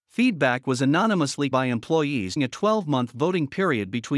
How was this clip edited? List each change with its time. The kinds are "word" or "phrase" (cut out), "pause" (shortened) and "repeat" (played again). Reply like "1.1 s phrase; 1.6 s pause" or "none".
1.5 s word; 2.4 s word